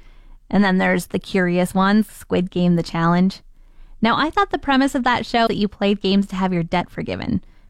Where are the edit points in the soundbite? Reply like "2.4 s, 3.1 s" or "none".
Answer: 2.1 s, 5.5 s

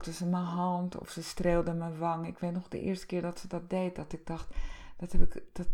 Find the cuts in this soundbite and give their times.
none

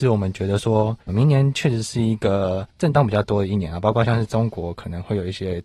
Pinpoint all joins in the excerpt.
1.0 s, 2.7 s

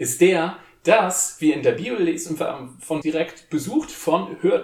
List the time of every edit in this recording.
3.0 s

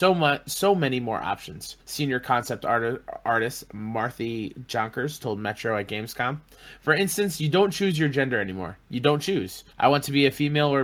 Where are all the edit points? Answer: 1.8 s, 9.7 s

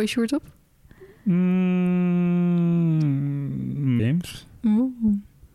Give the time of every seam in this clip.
4.0 s

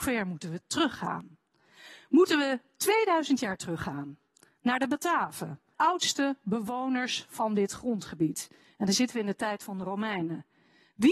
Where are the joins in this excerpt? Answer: 5.7 s

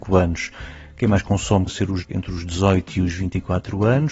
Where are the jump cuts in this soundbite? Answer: 1.7 s, 2.0 s

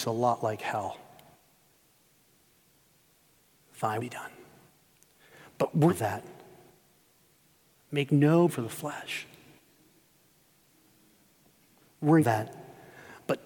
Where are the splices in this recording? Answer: 4.0 s, 5.9 s, 8.5 s, 12.2 s

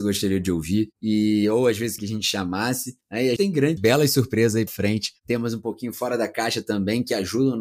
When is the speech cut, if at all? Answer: 2.0 s, 3.0 s, 3.4 s, 3.8 s, 4.7 s

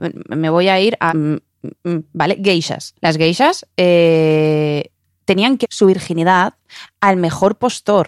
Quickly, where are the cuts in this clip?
1.1 s, 1.8 s, 3.0 s, 5.6 s

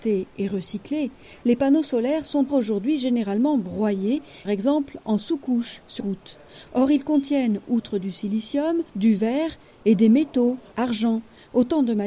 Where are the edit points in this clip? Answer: 2.5 s, 4.4 s, 6.0 s, 8.9 s, 10.7 s

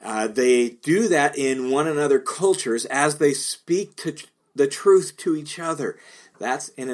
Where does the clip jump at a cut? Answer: none

